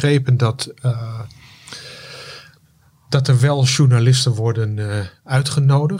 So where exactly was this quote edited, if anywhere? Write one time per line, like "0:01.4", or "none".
none

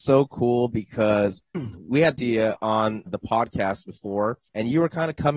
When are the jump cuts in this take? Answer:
0:01.5
0:02.2
0:03.1
0:04.5

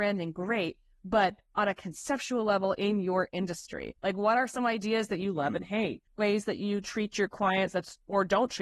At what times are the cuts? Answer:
0:04.0
0:06.1

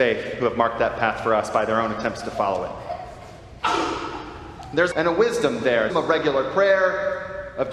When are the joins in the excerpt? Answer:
0:04.9
0:05.9

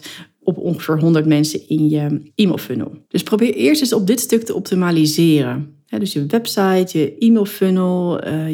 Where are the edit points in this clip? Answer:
0:03.0

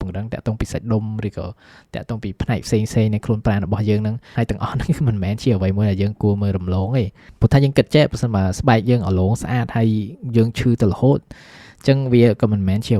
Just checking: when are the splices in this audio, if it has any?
none

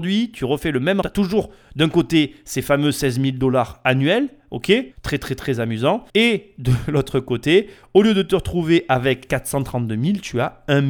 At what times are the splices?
0:01.0
0:04.9
0:06.1

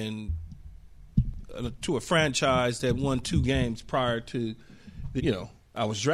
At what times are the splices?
0:05.2

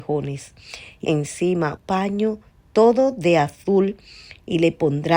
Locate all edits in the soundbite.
0:01.0
0:01.8

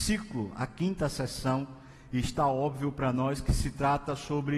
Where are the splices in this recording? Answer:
none

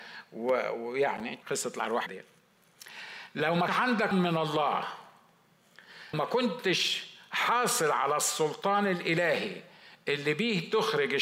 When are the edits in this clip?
0:01.4
0:02.1
0:03.7
0:04.1
0:06.1

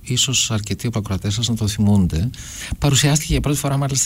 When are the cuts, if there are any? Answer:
0:00.9

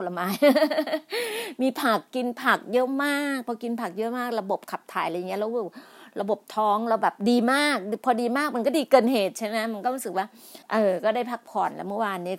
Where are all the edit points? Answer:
0:10.6

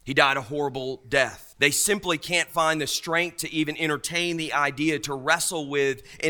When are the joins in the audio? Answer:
0:01.5

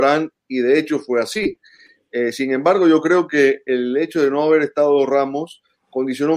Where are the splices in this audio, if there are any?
none

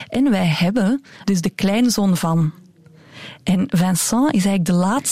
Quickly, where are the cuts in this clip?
0:01.2

